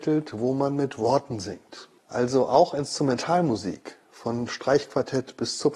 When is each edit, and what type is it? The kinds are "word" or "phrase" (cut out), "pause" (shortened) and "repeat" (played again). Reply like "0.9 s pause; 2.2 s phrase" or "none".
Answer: 2.0 s pause